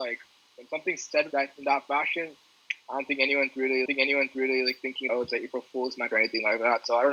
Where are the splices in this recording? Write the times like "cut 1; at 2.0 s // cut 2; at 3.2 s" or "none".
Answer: cut 1; at 1.3 s // cut 2; at 3.9 s // cut 3; at 5.1 s // cut 4; at 6.1 s